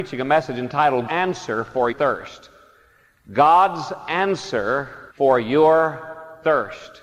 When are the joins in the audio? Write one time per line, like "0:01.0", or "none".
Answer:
0:01.1
0:01.9
0:05.1